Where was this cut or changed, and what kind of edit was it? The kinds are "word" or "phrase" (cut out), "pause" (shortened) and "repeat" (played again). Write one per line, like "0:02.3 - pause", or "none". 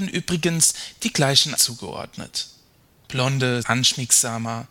0:01.5 - word
0:03.6 - word